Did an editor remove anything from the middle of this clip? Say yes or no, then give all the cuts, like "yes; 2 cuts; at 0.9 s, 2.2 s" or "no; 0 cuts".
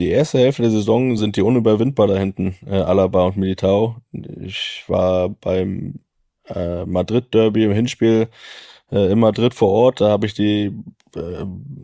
no; 0 cuts